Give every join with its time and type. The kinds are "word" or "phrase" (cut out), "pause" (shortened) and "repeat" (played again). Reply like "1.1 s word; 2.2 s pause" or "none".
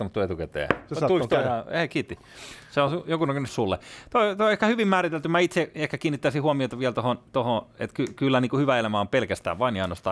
3.5 s phrase